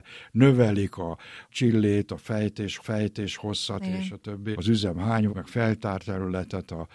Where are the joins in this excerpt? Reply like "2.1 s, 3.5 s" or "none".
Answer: 2.8 s, 4.5 s, 5.3 s